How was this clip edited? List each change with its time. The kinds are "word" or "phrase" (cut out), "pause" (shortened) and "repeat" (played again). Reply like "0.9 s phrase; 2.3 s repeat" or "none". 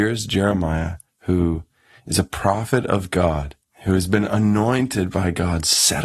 none